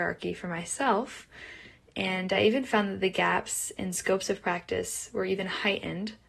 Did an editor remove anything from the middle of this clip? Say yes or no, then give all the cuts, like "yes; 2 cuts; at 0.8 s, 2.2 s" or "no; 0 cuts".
no; 0 cuts